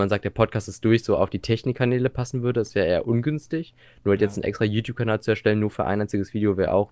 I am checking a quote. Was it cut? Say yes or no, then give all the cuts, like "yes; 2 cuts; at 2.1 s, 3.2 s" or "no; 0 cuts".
no; 0 cuts